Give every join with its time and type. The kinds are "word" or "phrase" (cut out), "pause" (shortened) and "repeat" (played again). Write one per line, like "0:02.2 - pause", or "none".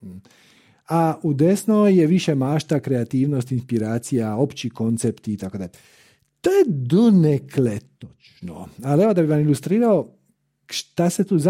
none